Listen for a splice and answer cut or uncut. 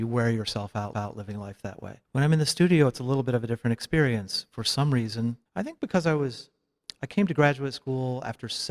cut